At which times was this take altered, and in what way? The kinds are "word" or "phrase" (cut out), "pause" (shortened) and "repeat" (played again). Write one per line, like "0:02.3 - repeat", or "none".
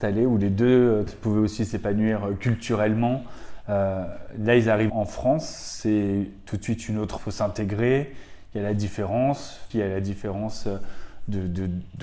0:01.1 - word
0:04.9 - word
0:07.2 - word
0:09.7 - word

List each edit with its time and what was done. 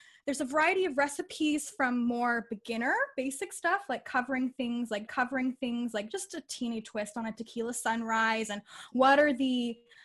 0:05.1 - repeat

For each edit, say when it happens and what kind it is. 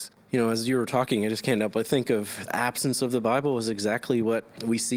0:02.5 - word

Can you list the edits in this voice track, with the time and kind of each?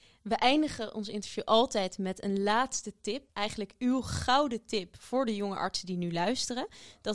0:03.3 - pause

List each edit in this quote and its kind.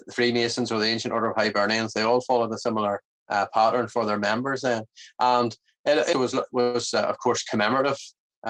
0:06.1 - word

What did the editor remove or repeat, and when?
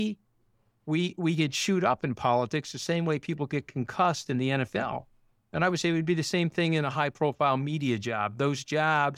none

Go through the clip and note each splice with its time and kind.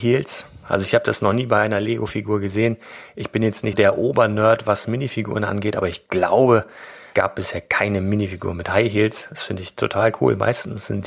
0:03.7 - word
0:07.1 - word

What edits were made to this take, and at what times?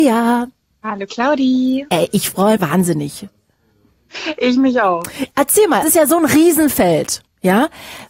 0:02.6 - word
0:05.8 - phrase

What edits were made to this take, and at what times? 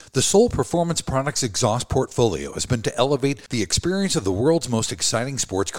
0:02.8 - word

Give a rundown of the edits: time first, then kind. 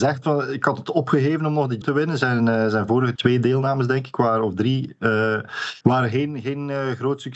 0:01.8 - word
0:03.2 - word
0:05.8 - pause

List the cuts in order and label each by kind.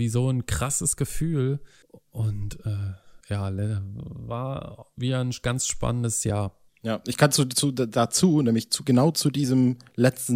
0:01.8 - pause
0:03.2 - pause
0:06.7 - pause

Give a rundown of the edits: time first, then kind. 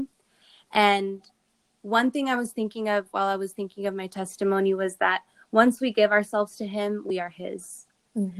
none

